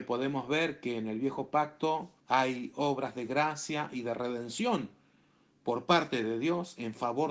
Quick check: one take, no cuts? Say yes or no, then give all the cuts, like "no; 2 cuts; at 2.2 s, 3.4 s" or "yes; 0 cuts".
no; 1 cut; at 2.2 s